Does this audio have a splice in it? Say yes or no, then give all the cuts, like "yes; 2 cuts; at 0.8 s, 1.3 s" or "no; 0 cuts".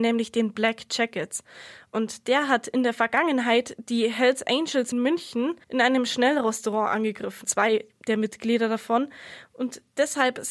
yes; 3 cuts; at 4.9 s, 5.6 s, 7.4 s